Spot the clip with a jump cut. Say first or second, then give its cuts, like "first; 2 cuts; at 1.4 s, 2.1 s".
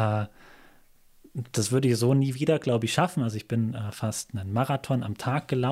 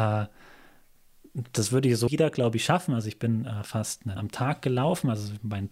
second; 2 cuts; at 2.1 s, 4.2 s